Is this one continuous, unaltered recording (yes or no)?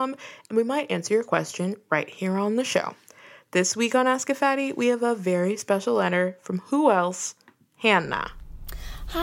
yes